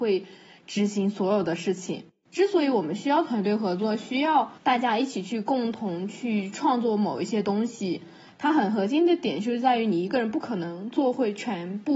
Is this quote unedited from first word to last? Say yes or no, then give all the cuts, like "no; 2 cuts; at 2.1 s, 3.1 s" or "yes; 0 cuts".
no; 1 cut; at 4.6 s